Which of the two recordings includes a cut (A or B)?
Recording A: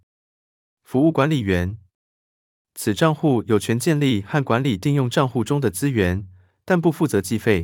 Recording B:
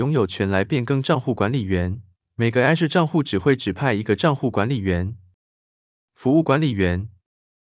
B